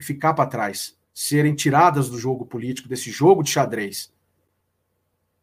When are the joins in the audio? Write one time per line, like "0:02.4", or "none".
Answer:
0:01.0